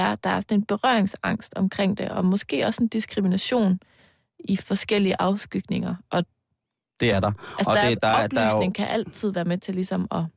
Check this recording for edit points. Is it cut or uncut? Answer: uncut